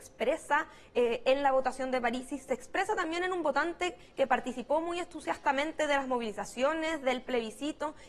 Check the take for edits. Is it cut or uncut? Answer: uncut